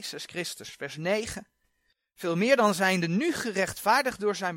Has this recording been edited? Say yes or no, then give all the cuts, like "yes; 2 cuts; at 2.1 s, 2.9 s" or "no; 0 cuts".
no; 0 cuts